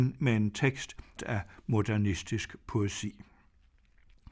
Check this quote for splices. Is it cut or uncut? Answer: cut